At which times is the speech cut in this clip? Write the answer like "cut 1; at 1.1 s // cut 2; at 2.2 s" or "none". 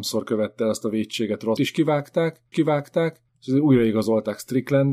cut 1; at 1.6 s // cut 2; at 2.5 s